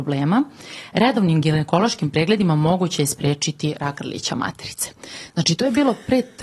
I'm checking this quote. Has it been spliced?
no; 0 cuts

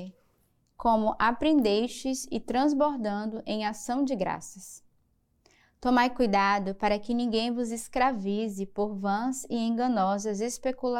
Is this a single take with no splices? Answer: yes; 0 cuts

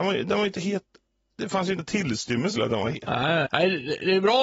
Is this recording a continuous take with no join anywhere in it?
no; 3 cuts; at 1.8 s, 2.6 s, 3.5 s

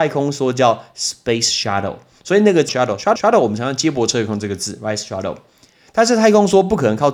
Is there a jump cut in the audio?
yes; 3 cuts; at 1.6 s, 2.7 s, 3.2 s

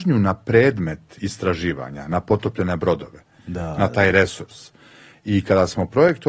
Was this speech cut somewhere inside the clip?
no; 0 cuts

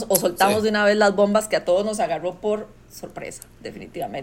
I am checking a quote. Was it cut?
no; 0 cuts

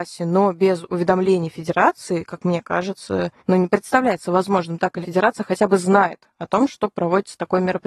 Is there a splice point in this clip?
yes; 2 cuts; at 3.4 s, 5.0 s

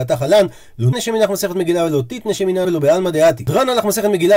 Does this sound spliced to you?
yes; 2 cuts; at 0.9 s, 2.6 s

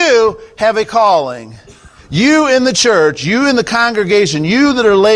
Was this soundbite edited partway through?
no; 0 cuts

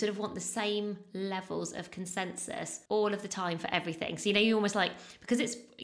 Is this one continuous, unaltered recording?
no; 1 cut; at 2.9 s

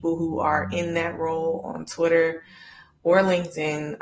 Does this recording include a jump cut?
no; 0 cuts

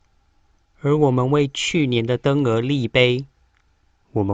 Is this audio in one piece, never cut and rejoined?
yes; 0 cuts

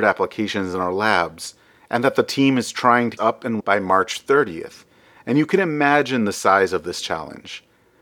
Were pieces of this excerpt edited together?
yes; 2 cuts; at 3.2 s, 3.6 s

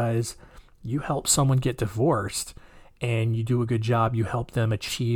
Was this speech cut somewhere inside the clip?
no; 0 cuts

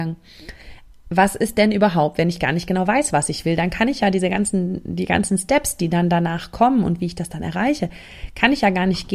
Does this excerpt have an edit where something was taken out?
no; 0 cuts

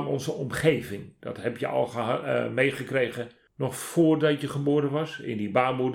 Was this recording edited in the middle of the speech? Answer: no; 0 cuts

